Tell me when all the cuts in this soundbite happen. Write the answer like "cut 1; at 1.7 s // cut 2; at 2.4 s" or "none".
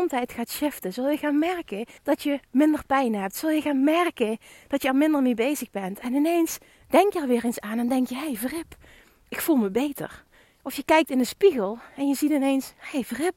cut 1; at 2.0 s